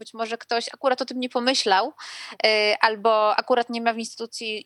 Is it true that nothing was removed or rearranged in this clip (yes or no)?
yes